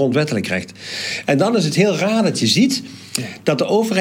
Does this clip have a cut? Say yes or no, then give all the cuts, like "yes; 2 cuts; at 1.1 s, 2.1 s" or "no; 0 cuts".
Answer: no; 0 cuts